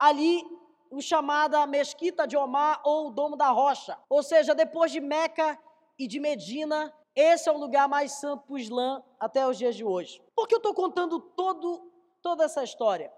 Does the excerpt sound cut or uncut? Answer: cut